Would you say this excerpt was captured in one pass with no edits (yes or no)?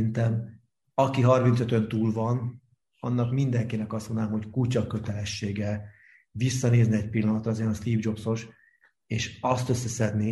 yes